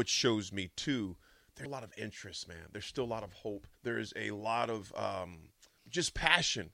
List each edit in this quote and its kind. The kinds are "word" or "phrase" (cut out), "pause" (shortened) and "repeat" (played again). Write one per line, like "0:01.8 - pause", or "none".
0:01.7 - word
0:03.8 - pause
0:05.8 - word